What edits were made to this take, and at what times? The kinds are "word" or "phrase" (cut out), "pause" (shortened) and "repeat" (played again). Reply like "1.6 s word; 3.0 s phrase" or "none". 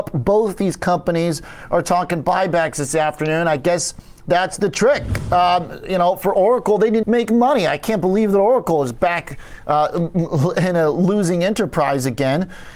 7.0 s word